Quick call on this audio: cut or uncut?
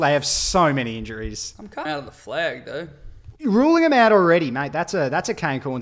cut